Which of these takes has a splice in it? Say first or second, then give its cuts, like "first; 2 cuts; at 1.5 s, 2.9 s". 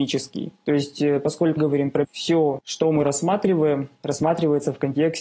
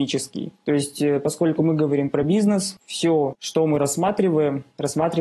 first; 2 cuts; at 1.6 s, 2.0 s